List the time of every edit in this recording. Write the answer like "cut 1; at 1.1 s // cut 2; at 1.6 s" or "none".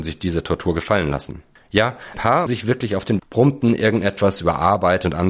cut 1; at 2.1 s // cut 2; at 2.5 s // cut 3; at 3.2 s